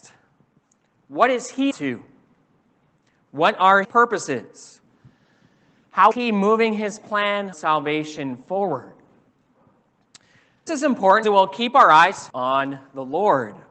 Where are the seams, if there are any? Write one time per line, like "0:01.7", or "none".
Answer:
0:01.7
0:03.8
0:06.1
0:07.5
0:10.7
0:11.2
0:12.3